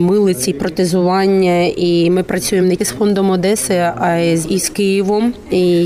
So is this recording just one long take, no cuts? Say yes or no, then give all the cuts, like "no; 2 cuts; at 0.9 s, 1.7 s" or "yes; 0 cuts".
no; 2 cuts; at 2.8 s, 4.4 s